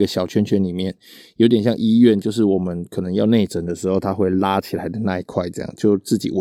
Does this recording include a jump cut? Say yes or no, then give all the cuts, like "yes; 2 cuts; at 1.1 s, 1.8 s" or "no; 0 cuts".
no; 0 cuts